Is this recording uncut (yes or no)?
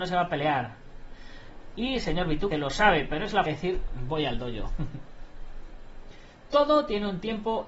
no